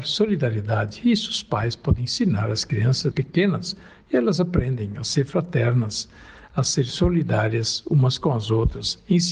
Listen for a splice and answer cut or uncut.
cut